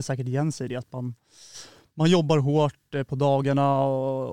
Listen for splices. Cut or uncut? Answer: uncut